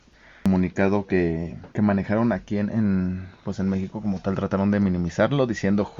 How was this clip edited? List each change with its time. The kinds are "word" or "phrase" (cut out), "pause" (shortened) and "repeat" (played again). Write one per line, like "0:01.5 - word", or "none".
0:01.7 - pause